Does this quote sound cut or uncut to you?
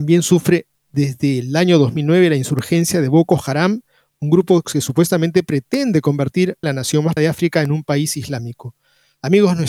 cut